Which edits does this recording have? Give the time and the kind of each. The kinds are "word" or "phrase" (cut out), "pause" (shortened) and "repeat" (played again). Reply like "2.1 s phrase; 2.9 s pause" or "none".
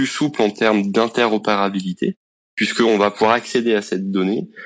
none